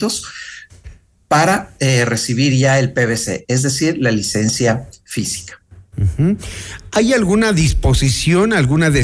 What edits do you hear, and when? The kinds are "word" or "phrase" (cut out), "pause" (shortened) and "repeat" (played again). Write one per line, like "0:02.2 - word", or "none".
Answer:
none

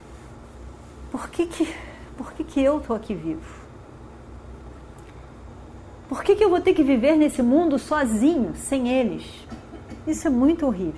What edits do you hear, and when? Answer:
none

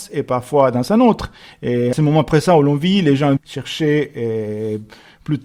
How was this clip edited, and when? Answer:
0:01.9 - word
0:03.4 - phrase

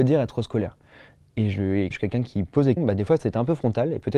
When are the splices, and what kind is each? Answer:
0:01.9 - word
0:02.8 - word

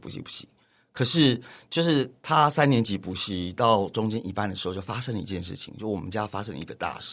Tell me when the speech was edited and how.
none

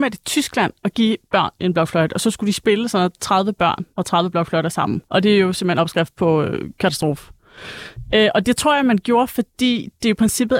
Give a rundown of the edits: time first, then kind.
0:03.9 - pause
0:05.1 - pause

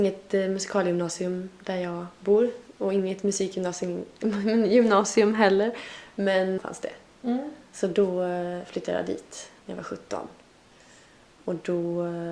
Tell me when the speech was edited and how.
0:06.6 - phrase
0:09.6 - pause

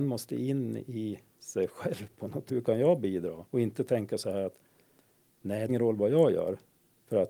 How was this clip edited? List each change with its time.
0:02.5 - phrase
0:03.5 - pause
0:05.7 - phrase

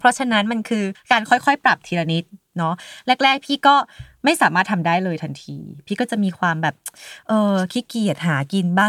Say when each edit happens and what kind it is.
0:00.9 - pause

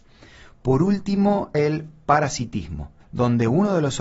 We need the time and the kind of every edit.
0:01.5 - word
0:03.0 - pause

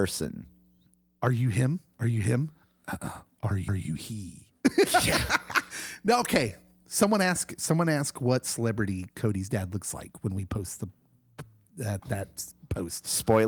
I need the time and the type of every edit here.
0:03.7 - repeat
0:12.0 - word

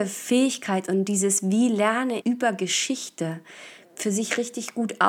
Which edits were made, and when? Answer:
0:02.2 - word

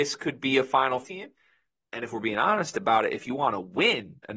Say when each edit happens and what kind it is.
0:01.0 - word

